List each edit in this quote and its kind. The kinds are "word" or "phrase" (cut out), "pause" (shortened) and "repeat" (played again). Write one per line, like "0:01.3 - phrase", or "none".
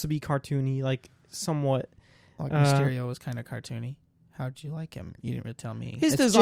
none